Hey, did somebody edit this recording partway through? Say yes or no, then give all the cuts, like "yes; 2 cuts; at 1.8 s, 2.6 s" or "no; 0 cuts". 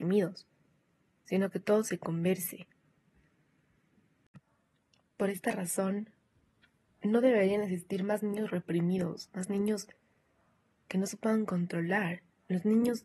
no; 0 cuts